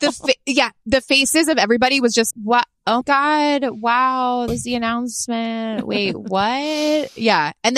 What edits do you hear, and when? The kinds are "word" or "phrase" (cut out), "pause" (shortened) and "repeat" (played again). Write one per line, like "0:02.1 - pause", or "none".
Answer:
0:02.3 - word
0:03.0 - word
0:04.5 - word